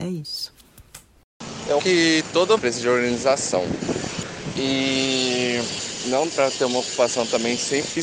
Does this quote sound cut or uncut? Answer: cut